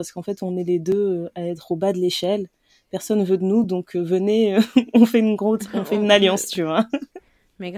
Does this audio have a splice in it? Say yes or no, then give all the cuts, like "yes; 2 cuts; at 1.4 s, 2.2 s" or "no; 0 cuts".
no; 0 cuts